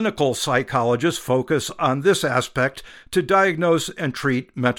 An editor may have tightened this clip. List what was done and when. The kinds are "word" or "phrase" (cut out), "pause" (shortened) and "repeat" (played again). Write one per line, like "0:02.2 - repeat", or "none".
none